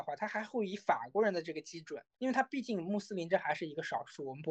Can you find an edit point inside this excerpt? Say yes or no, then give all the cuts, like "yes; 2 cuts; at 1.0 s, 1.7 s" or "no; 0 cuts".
yes; 1 cut; at 2.1 s